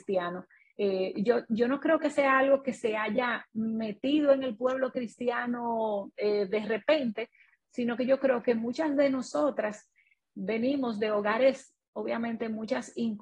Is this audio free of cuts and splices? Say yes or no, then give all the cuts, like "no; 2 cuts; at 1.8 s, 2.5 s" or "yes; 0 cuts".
yes; 0 cuts